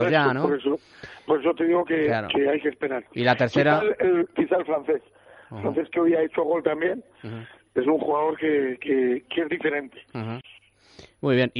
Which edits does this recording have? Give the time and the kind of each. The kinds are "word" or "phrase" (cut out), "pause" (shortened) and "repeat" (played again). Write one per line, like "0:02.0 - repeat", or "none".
0:09.3 - phrase